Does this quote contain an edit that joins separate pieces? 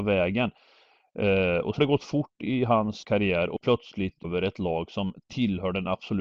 yes; 4 cuts; at 1.8 s, 3.0 s, 3.6 s, 4.2 s

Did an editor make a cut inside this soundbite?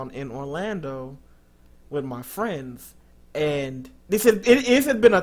yes; 1 cut; at 4.0 s

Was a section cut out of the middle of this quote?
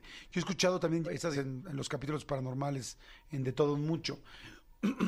yes; 2 cuts; at 1.0 s, 1.3 s

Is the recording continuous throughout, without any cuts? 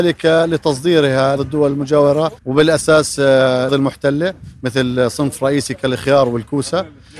no; 3 cuts; at 1.4 s, 2.4 s, 3.7 s

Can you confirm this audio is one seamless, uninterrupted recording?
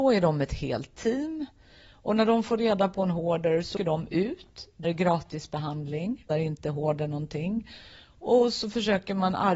no; 3 cuts; at 3.8 s, 4.8 s, 6.3 s

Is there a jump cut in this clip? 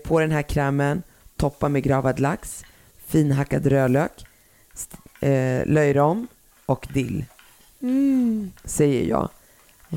no; 0 cuts

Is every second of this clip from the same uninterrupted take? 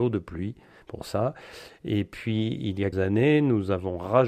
no; 1 cut; at 2.9 s

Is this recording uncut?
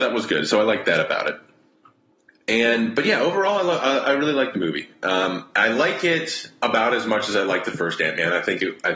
yes; 0 cuts

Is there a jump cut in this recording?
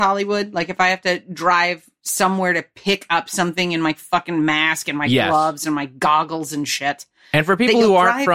no; 0 cuts

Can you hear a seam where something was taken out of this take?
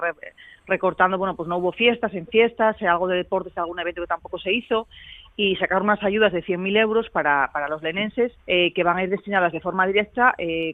yes; 1 cut; at 8.4 s

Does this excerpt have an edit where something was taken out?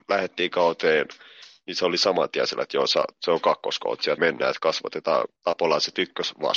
yes; 2 cuts; at 4.2 s, 5.4 s

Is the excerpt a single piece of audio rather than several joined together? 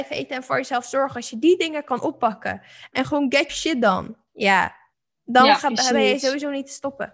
no; 2 cuts; at 3.5 s, 4.9 s

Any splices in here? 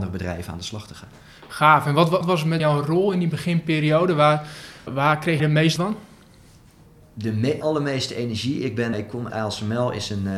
yes; 8 cuts; at 2.2 s, 2.6 s, 4.9 s, 5.4 s, 5.8 s, 7.6 s, 8.9 s, 9.3 s

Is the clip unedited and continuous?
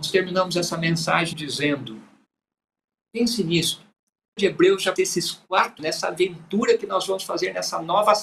no; 4 cuts; at 1.3 s, 4.4 s, 5.0 s, 5.8 s

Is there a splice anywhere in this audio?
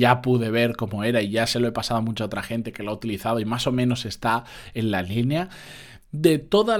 no; 0 cuts

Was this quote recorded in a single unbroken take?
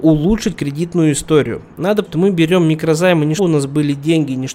no; 2 cuts; at 2.0 s, 3.4 s

